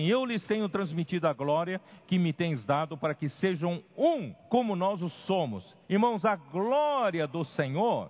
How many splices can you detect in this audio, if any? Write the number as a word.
two